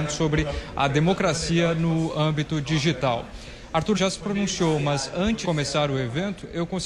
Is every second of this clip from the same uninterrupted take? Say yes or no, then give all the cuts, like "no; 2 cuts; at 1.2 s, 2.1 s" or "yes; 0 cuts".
no; 2 cuts; at 3.9 s, 5.4 s